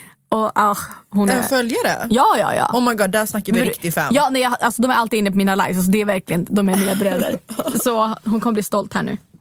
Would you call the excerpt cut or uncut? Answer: uncut